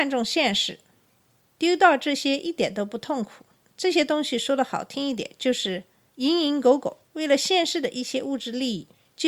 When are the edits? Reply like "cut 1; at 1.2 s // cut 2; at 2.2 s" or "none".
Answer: cut 1; at 7.1 s